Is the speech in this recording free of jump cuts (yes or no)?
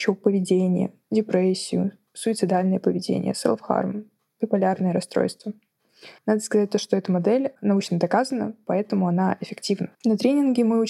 no